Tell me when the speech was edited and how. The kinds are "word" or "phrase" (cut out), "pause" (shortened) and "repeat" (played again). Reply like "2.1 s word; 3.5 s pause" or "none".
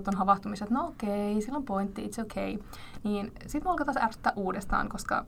none